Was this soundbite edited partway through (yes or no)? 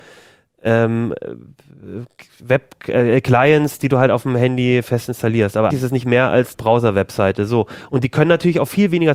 yes